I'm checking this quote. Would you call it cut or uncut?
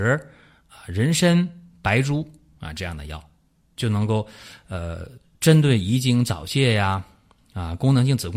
uncut